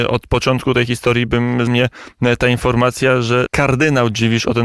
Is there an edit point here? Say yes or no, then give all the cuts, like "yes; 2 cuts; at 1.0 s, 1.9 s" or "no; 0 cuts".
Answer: yes; 2 cuts; at 1.7 s, 3.5 s